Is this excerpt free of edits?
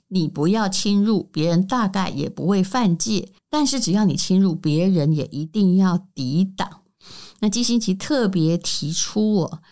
no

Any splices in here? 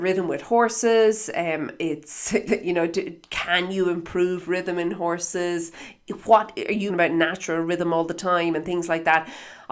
yes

